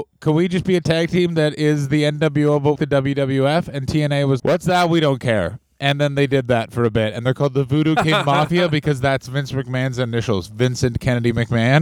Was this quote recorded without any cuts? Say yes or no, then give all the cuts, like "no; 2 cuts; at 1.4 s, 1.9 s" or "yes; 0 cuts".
no; 2 cuts; at 2.8 s, 4.4 s